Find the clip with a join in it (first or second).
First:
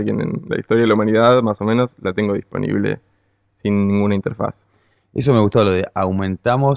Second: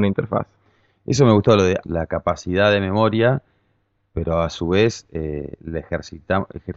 second